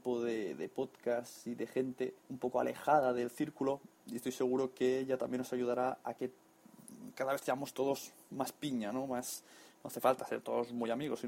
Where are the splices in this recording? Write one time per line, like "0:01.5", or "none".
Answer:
0:02.2